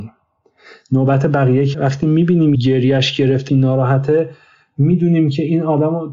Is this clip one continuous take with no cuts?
no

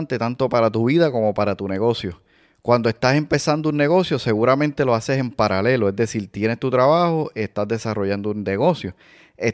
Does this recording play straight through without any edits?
yes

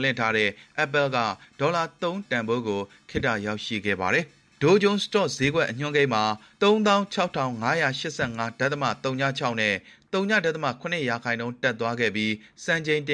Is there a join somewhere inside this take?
yes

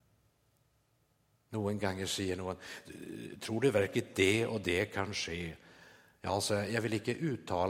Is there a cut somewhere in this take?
no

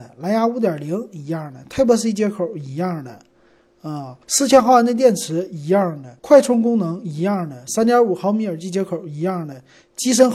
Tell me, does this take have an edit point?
yes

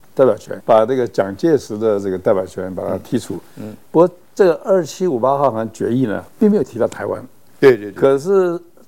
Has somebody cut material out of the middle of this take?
no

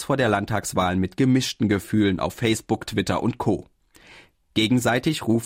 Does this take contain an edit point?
no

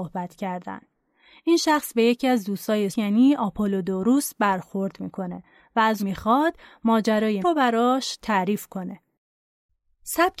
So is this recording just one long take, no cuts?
no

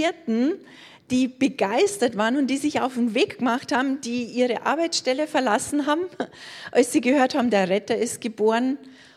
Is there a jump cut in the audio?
no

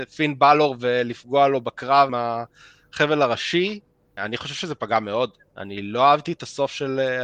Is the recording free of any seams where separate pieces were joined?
no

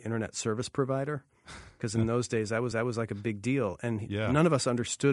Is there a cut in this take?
yes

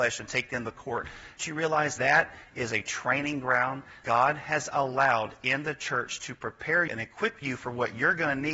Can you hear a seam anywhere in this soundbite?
yes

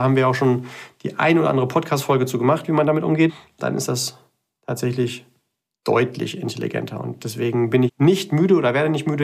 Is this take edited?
yes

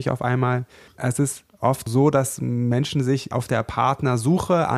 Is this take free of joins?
yes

